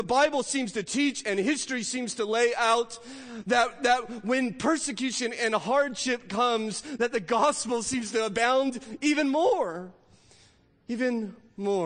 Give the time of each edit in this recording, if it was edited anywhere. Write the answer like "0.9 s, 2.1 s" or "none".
none